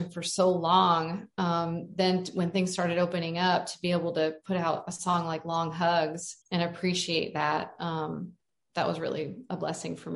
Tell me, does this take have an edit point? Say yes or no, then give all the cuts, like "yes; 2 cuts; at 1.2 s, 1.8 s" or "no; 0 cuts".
yes; 1 cut; at 6.4 s